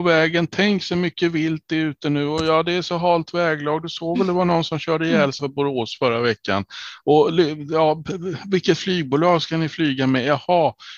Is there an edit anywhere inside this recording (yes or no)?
yes